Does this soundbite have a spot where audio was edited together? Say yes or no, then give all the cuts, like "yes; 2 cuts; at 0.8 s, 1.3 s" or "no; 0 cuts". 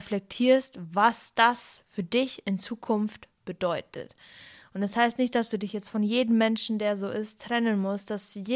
no; 0 cuts